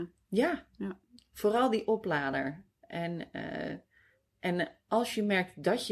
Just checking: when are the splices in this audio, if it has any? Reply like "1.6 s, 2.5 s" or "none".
none